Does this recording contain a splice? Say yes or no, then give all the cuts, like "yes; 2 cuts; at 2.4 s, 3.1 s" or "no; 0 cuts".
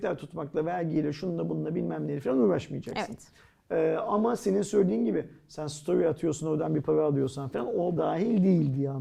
yes; 1 cut; at 8.0 s